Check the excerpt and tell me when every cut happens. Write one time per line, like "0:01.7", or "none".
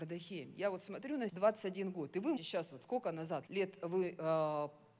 0:01.3
0:02.4
0:03.5